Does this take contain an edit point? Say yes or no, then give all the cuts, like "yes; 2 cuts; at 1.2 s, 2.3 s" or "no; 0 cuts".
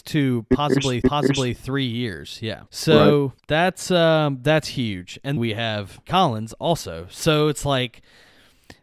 yes; 5 cuts; at 1.0 s, 2.7 s, 3.4 s, 5.4 s, 6.0 s